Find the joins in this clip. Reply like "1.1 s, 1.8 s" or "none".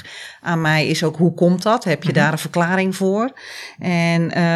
none